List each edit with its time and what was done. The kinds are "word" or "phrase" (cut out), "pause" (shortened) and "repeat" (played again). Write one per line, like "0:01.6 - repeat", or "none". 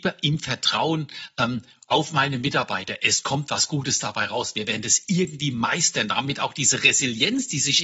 none